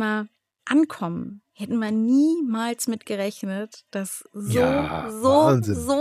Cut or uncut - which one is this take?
uncut